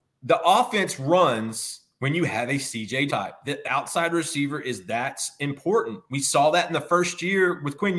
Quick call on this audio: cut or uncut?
cut